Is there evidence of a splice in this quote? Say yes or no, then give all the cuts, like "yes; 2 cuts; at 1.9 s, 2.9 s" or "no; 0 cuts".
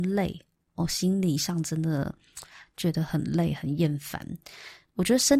no; 0 cuts